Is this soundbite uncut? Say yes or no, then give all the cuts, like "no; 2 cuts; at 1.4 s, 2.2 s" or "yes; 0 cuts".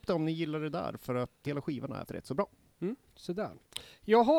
no; 2 cuts; at 1.5 s, 2.1 s